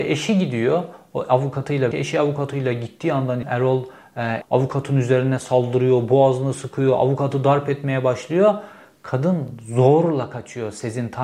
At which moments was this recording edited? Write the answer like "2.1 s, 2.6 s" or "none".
1.9 s, 3.4 s, 4.4 s